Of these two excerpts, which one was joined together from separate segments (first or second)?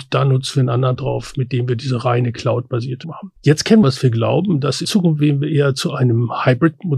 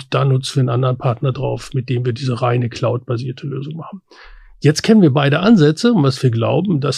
first